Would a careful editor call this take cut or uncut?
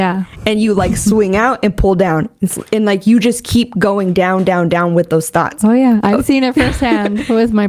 uncut